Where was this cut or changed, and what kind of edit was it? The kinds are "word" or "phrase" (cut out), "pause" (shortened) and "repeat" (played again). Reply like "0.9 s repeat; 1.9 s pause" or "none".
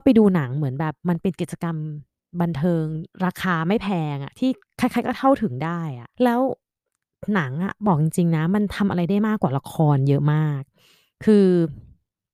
3.1 s pause; 4.6 s pause; 6.1 s pause